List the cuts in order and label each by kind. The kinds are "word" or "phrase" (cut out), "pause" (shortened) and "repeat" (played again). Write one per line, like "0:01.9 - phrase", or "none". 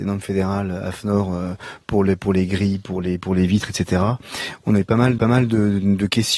0:05.2 - repeat

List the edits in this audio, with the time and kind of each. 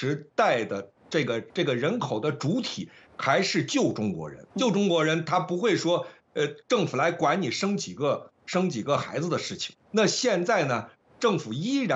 0:01.5 - pause
0:04.5 - pause
0:09.8 - word

